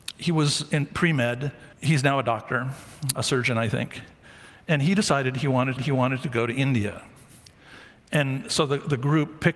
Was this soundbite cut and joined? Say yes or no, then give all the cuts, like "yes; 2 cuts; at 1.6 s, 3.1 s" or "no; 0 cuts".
yes; 3 cuts; at 1.7 s, 3.1 s, 5.8 s